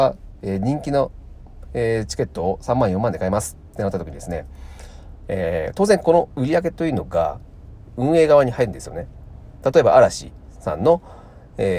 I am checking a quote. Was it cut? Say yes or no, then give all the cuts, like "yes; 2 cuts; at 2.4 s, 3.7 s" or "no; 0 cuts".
no; 0 cuts